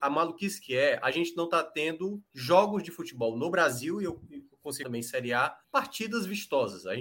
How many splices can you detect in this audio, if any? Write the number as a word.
three